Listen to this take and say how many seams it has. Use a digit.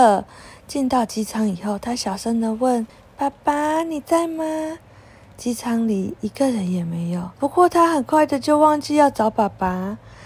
2